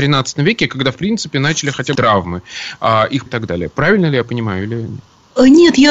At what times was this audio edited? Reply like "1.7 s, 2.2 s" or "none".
2.0 s, 3.3 s